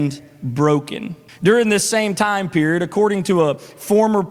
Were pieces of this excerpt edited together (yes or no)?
yes